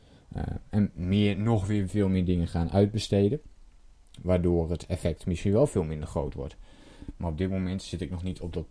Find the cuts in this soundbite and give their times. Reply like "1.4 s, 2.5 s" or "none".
0.9 s